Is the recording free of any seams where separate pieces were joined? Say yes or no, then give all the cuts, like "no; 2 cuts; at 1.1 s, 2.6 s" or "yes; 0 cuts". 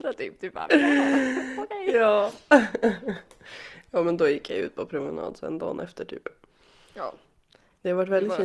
yes; 0 cuts